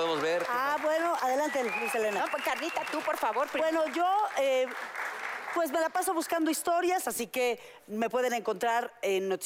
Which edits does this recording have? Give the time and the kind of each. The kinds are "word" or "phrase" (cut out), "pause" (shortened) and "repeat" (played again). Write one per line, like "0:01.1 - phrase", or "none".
none